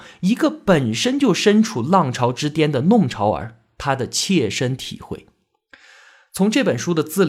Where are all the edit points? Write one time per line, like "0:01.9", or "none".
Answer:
none